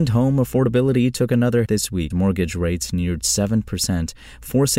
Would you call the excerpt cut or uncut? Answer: cut